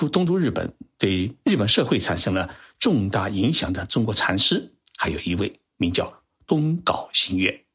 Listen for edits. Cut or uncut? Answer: uncut